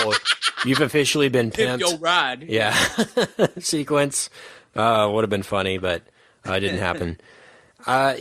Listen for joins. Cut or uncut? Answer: uncut